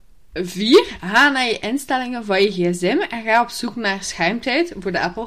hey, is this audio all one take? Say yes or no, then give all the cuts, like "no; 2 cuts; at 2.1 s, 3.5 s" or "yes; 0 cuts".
yes; 0 cuts